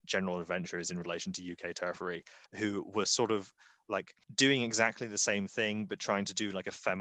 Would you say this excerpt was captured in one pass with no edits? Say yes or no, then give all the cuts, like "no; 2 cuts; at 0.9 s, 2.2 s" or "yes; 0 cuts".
no; 2 cuts; at 2.5 s, 4.2 s